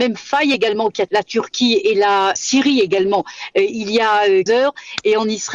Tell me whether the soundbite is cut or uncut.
cut